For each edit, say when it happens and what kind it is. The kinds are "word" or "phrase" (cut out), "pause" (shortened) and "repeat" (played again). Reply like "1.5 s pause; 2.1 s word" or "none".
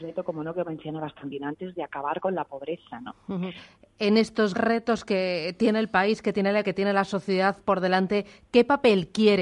4.5 s word; 6.6 s word

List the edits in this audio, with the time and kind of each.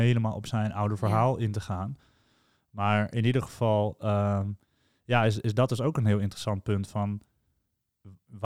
none

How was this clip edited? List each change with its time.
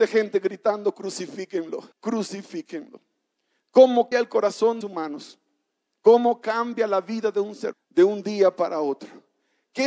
1.9 s pause; 4.1 s word; 4.8 s phrase; 7.7 s word

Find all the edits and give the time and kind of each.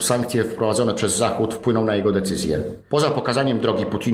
none

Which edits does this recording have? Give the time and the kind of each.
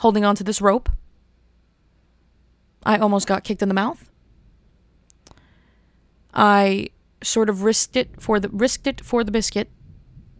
none

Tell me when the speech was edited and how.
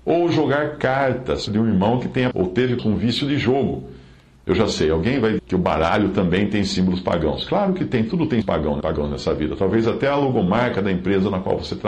1.5 s word; 2.3 s word; 2.8 s word; 5.4 s word; 8.4 s word; 8.8 s word

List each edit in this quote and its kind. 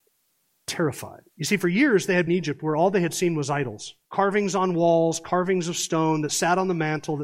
1.3 s pause; 2.3 s phrase; 4.0 s pause

